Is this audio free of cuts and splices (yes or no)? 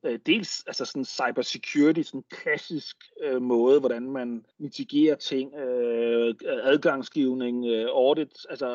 no